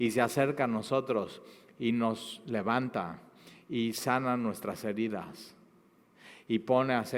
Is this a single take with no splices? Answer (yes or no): yes